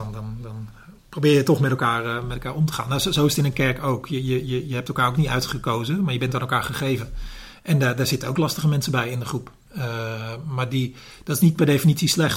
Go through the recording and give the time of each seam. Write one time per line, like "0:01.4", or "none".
0:01.0